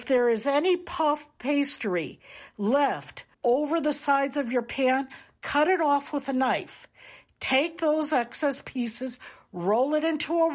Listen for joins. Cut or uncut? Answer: cut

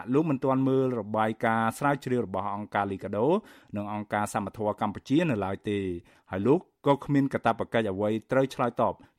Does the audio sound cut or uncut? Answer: uncut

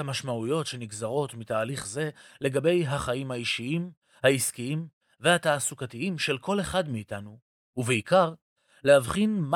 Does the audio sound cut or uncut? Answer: uncut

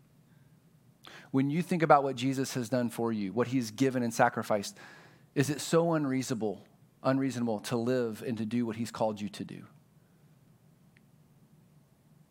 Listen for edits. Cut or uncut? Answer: uncut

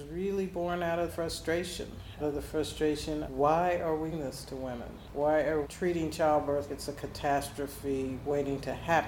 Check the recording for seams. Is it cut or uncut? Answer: cut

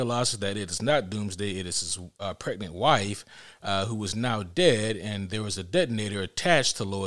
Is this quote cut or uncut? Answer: uncut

